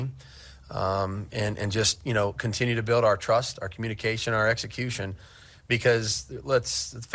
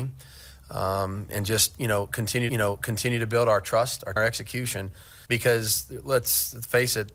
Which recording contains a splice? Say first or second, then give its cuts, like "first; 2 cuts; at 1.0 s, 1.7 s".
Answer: second; 4 cuts; at 1.3 s, 2.5 s, 4.2 s, 5.3 s